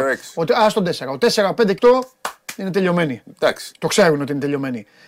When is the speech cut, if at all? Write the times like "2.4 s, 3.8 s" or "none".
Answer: 1.8 s